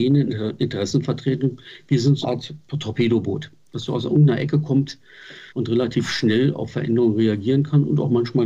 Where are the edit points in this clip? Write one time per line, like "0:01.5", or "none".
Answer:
0:02.2
0:05.5